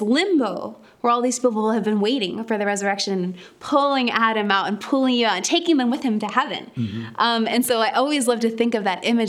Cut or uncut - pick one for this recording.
uncut